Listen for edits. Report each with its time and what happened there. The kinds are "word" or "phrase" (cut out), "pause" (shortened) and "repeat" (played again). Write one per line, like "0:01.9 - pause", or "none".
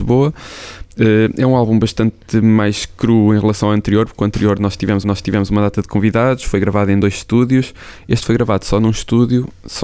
0:05.0 - repeat